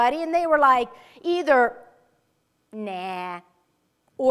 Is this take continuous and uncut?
yes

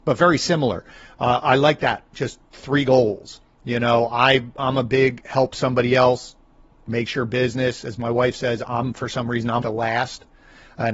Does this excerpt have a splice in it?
yes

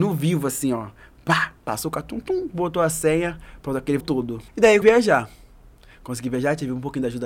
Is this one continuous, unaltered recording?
no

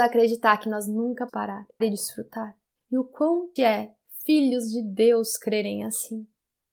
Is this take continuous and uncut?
no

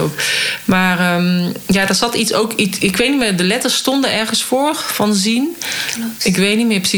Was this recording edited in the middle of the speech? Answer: no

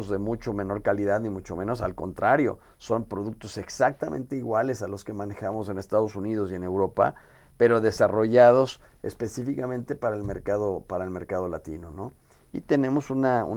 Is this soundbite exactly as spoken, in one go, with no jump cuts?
yes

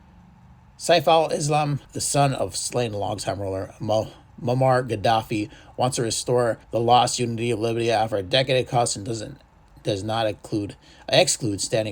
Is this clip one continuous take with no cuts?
no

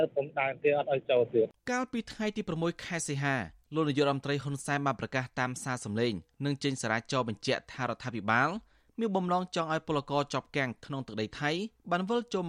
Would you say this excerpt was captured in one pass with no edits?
no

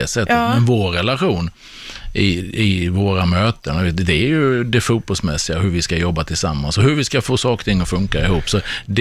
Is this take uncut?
yes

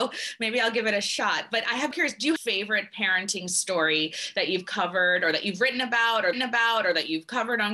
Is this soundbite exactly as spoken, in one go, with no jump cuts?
no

